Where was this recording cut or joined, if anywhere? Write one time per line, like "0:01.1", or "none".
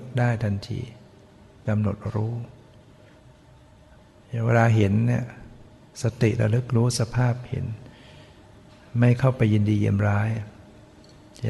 none